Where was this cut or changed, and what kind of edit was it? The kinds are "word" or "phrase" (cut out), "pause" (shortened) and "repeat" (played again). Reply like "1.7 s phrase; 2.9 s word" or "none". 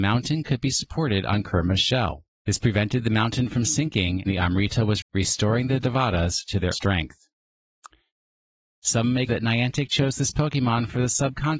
2.3 s pause; 4.3 s word; 5.0 s word; 6.7 s word; 9.3 s phrase